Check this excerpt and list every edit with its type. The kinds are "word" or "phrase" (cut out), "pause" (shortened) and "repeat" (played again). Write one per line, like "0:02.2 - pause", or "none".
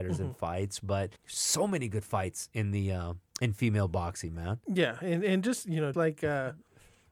0:01.2 - pause
0:03.3 - pause
0:05.9 - word